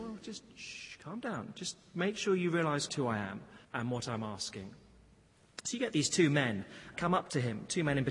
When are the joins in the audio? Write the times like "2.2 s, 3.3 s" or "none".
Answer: 2.9 s, 3.6 s, 6.9 s